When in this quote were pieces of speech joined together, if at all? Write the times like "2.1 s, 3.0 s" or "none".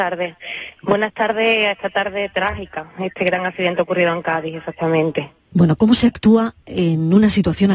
5.4 s